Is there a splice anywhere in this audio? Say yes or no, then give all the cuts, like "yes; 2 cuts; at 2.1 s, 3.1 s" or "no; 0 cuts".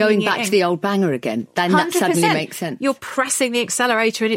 no; 0 cuts